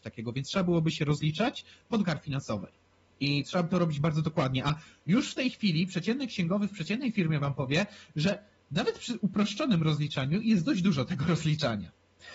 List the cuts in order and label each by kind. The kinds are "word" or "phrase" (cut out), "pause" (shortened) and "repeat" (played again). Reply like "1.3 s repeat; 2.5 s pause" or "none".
2.0 s word